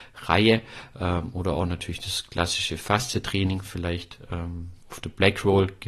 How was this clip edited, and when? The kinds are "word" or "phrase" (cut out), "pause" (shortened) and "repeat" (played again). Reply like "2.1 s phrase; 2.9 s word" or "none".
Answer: 4.8 s pause